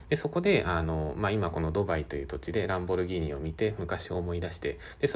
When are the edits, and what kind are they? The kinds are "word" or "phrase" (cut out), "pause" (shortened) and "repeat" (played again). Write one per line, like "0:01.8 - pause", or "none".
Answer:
none